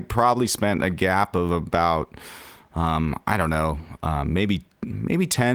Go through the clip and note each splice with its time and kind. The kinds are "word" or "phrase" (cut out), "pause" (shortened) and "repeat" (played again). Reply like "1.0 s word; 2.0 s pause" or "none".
none